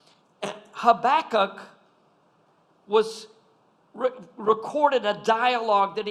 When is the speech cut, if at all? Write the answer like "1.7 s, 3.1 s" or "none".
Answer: none